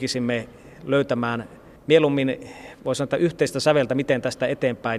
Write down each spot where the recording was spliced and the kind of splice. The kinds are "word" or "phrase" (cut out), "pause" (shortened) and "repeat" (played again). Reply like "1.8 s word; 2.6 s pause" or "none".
1.8 s pause